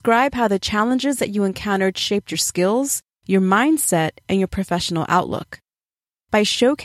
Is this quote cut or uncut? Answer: uncut